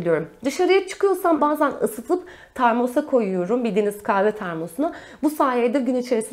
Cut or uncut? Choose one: cut